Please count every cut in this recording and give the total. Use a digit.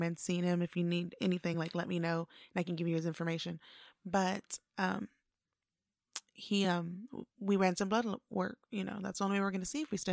0